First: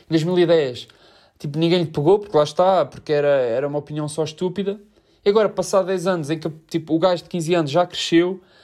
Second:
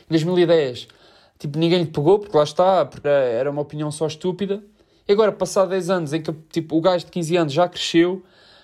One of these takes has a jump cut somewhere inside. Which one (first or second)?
second